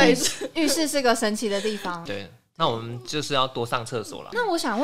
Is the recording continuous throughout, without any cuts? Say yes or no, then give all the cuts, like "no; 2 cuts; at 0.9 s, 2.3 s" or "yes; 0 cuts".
yes; 0 cuts